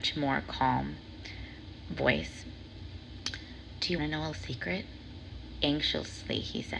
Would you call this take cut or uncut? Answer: cut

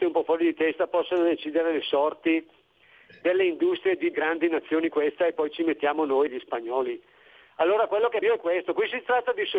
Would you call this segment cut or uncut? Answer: cut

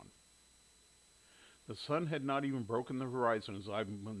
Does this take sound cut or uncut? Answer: uncut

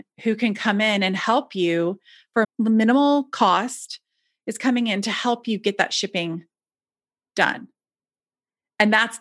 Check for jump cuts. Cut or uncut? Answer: cut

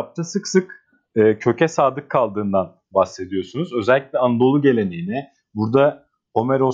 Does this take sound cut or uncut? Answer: uncut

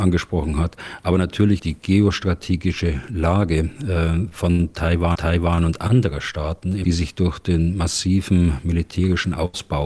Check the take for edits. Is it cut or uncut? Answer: cut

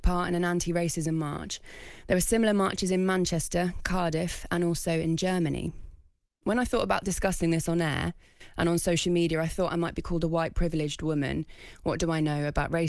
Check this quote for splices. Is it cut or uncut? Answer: uncut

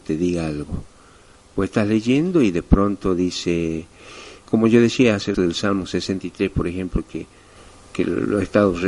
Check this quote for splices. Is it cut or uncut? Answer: cut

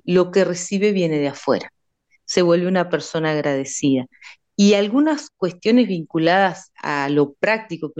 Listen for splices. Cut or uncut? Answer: uncut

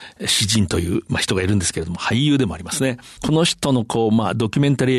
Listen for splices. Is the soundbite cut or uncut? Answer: cut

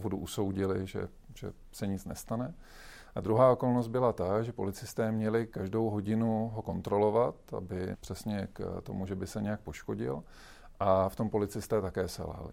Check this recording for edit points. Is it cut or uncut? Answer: cut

